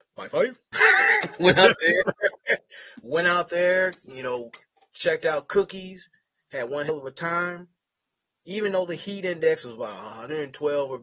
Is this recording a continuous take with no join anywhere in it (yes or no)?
yes